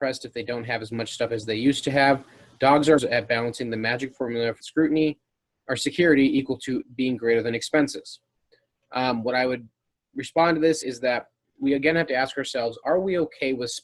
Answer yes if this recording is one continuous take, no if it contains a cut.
no